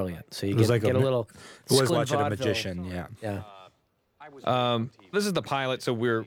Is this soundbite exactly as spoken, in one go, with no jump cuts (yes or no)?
no